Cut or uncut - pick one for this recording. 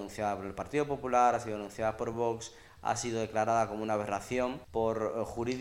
uncut